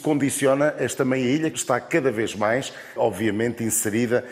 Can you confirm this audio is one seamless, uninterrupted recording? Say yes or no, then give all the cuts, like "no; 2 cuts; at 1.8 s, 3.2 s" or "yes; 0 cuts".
no; 2 cuts; at 1.5 s, 3.0 s